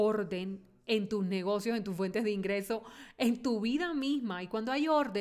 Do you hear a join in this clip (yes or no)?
no